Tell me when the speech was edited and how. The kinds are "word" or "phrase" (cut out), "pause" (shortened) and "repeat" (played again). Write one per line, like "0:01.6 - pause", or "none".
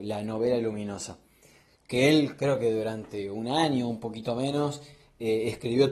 none